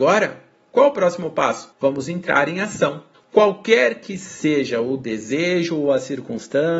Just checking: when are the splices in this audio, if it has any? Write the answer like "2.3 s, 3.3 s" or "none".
1.7 s, 3.1 s